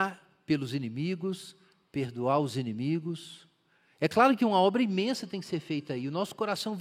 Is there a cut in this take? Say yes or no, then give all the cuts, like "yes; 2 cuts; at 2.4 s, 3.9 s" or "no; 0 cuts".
no; 0 cuts